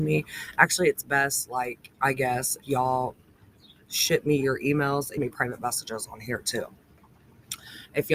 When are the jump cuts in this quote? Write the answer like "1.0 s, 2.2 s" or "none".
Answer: 1.9 s, 2.6 s, 5.2 s